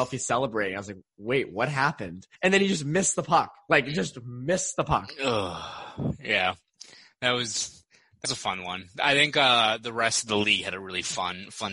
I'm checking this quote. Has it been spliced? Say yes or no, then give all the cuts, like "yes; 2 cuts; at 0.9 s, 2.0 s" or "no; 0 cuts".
yes; 2 cuts; at 2.3 s, 8.2 s